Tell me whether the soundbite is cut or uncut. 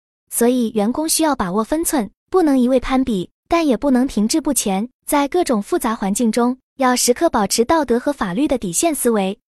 cut